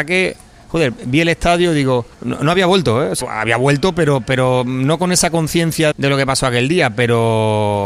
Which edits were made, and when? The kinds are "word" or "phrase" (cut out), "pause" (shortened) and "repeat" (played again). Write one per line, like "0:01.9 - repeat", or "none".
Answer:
0:02.1 - pause
0:03.2 - word
0:05.9 - word